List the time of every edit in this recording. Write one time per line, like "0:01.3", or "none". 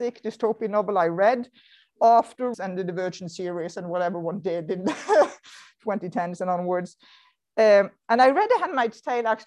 0:02.5